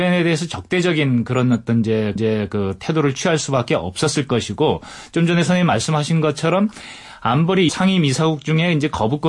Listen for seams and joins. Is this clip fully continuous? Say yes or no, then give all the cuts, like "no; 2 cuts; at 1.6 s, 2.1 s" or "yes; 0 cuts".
no; 2 cuts; at 2.2 s, 7.7 s